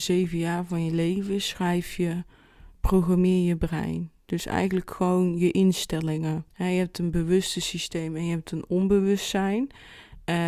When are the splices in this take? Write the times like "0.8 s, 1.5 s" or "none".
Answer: 2.7 s, 6.5 s